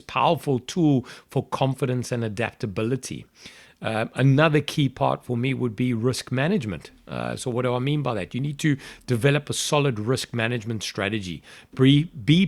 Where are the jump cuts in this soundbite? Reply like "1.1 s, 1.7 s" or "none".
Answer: none